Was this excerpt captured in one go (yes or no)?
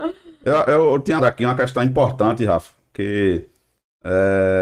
no